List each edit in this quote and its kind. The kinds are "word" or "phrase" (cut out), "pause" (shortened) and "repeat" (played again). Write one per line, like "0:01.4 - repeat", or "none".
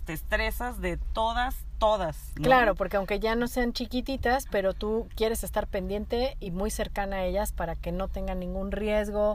none